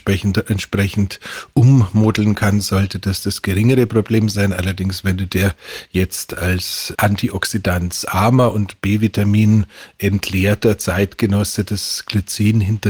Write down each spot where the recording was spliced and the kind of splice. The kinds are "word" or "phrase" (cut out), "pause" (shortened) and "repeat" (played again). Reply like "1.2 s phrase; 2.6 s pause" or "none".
6.9 s word